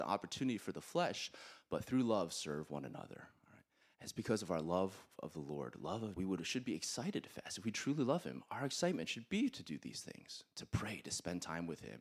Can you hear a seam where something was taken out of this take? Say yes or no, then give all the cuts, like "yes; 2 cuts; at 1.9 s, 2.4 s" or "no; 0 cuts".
yes; 1 cut; at 6.2 s